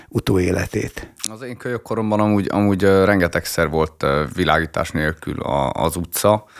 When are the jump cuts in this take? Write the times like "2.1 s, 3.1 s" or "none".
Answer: none

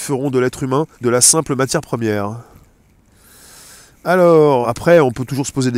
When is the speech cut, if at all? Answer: 0.9 s, 4.6 s

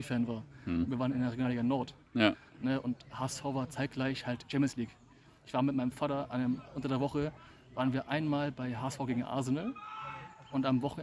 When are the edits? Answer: none

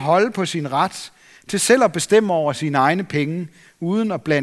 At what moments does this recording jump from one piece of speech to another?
none

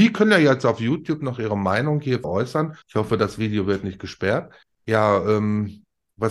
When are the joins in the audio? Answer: 2.2 s, 2.8 s, 4.6 s

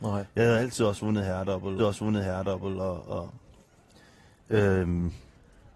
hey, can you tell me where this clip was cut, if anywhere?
1.8 s

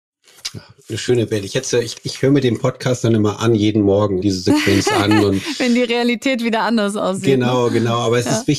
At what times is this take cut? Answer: 1.9 s, 4.2 s

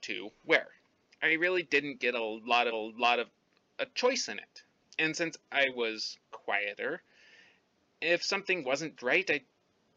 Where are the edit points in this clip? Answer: 2.7 s, 9.0 s

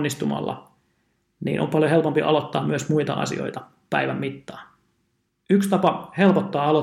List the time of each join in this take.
none

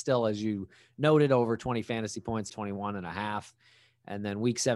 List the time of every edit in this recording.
2.5 s

